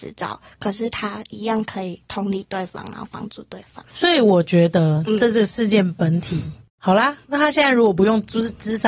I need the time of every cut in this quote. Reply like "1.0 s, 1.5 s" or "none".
3.9 s, 7.2 s